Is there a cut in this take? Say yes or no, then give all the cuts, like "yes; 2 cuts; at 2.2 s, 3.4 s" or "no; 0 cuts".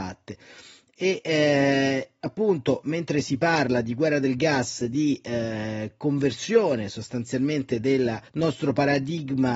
yes; 1 cut; at 8.3 s